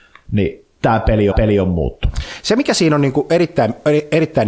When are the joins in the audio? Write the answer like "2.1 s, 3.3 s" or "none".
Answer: 1.3 s